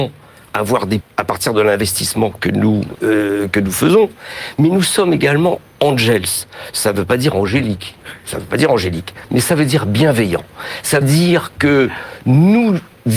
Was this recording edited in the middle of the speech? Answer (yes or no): yes